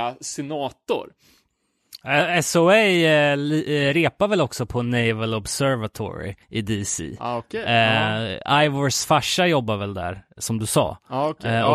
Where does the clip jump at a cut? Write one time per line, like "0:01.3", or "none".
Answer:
0:06.4